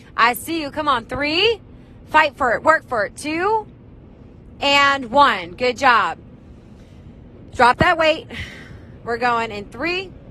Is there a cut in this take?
no; 0 cuts

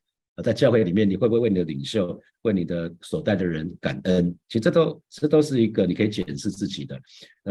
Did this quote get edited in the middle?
no; 0 cuts

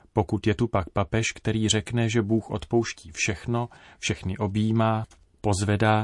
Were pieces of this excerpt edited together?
no; 0 cuts

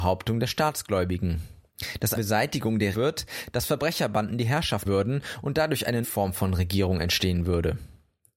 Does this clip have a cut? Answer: yes; 4 cuts; at 2.1 s, 2.9 s, 4.8 s, 6.0 s

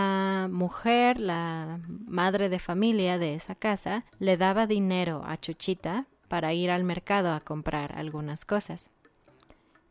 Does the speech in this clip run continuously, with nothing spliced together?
no; 1 cut; at 4.1 s

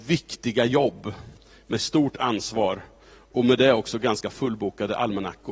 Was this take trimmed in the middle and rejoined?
no; 0 cuts

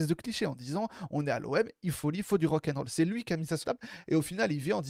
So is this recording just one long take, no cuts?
no; 2 cuts; at 1.9 s, 3.6 s

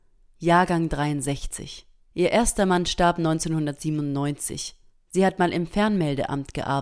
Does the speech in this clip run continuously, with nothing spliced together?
no; 2 cuts; at 2.0 s, 4.9 s

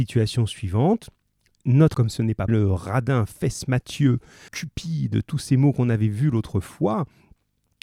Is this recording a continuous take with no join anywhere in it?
no; 3 cuts; at 1.9 s, 2.5 s, 4.5 s

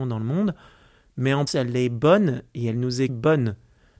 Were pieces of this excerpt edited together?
yes; 2 cuts; at 1.5 s, 3.1 s

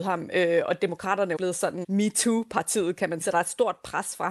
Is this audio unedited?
no; 3 cuts; at 1.4 s, 1.8 s, 3.2 s

